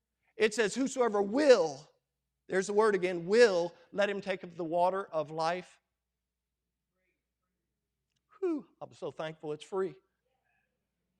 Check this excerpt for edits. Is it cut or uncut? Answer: uncut